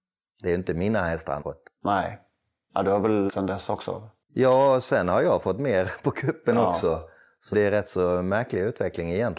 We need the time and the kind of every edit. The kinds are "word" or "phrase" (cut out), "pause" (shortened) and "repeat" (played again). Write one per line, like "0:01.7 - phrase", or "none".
0:01.4 - word
0:03.3 - word
0:07.5 - word